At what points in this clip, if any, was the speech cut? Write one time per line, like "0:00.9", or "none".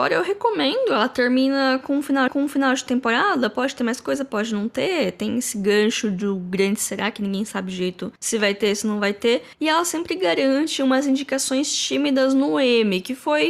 0:02.3
0:08.2
0:09.5